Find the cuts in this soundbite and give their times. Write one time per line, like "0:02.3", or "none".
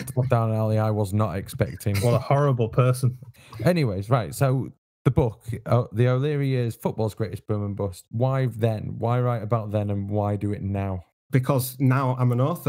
none